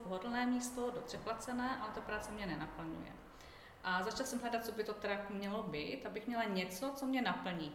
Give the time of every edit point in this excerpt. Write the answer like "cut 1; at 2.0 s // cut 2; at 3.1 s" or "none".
none